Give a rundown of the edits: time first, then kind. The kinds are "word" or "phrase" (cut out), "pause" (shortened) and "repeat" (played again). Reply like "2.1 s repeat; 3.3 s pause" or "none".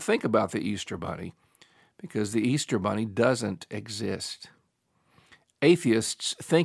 none